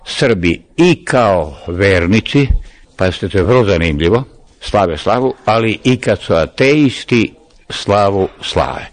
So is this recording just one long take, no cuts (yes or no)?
yes